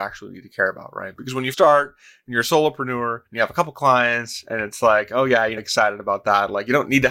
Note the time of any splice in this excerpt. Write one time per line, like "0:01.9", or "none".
0:01.5
0:03.3
0:05.6